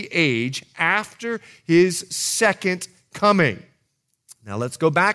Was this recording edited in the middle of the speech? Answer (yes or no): no